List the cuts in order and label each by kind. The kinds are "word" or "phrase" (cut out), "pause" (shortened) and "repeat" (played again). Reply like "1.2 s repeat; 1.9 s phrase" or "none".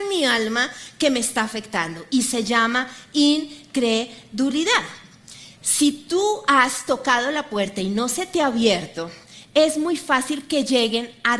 5.6 s pause